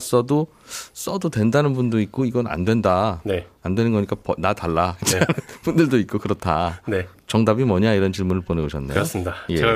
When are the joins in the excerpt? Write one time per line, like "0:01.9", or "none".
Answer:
none